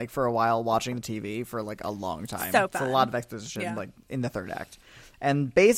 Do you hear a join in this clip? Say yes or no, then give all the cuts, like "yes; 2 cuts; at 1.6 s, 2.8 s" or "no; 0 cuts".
no; 0 cuts